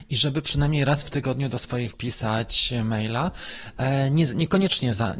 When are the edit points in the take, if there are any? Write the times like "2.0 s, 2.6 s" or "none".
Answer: 1.9 s

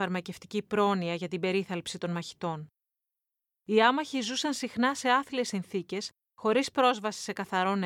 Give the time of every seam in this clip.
none

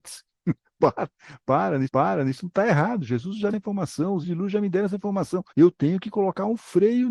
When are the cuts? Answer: 1.9 s, 3.5 s, 4.2 s, 5.5 s

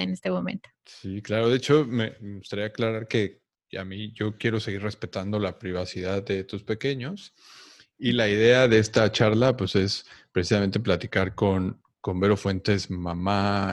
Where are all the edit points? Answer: none

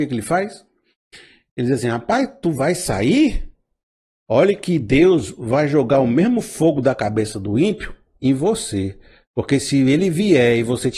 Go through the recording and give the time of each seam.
none

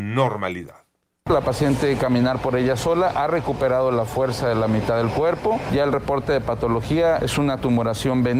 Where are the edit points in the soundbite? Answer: 2.0 s

